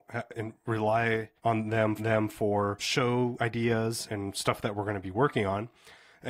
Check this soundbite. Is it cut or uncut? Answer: cut